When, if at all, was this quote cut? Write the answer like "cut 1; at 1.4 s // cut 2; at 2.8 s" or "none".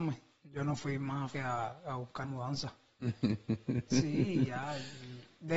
cut 1; at 1.3 s // cut 2; at 2.2 s